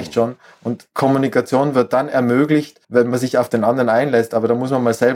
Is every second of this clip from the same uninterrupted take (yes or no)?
no